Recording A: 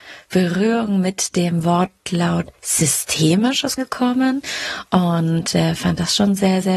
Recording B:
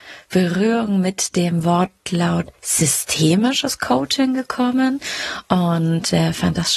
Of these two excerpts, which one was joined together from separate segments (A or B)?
A